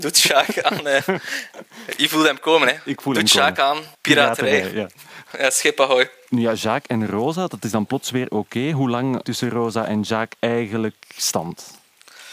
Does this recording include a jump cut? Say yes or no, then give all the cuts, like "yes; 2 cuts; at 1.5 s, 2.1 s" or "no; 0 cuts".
yes; 3 cuts; at 3.9 s, 9.2 s, 10.4 s